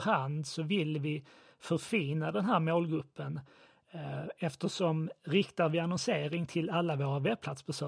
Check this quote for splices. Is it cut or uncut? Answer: uncut